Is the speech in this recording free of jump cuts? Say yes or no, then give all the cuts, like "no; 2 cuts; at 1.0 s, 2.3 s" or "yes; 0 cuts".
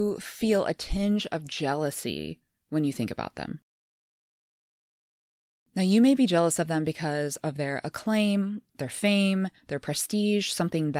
yes; 0 cuts